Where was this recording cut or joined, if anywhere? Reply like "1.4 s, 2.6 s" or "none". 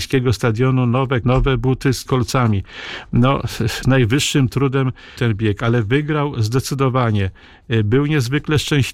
1.2 s, 2.1 s, 3.8 s, 5.2 s